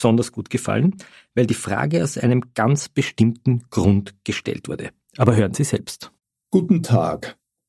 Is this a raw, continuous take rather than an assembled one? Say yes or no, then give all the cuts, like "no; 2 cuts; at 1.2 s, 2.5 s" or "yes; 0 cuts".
yes; 0 cuts